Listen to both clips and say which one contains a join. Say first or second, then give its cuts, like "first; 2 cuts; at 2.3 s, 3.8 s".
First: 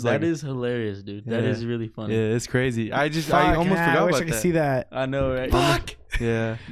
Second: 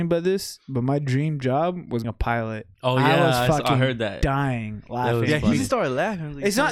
second; 2 cuts; at 2.0 s, 2.7 s